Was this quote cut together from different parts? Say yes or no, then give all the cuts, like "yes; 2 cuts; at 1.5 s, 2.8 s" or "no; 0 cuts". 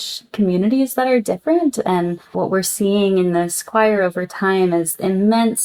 no; 0 cuts